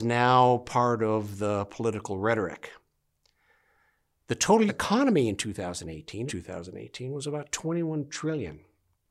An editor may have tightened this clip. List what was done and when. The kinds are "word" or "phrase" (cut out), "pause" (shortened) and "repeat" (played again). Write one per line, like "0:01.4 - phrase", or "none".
0:04.7 - word
0:06.3 - phrase